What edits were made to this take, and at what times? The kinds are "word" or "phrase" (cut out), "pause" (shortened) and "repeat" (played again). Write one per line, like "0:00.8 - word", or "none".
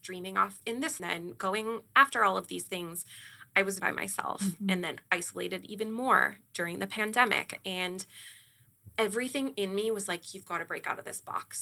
0:01.0 - phrase
0:03.8 - phrase